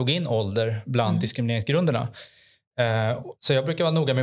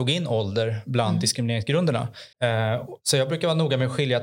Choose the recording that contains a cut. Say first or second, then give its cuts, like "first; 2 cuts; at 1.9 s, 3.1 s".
second; 1 cut; at 2.3 s